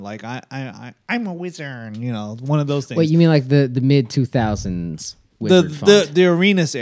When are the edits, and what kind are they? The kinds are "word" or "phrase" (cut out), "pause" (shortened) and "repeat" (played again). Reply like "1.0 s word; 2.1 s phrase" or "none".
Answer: none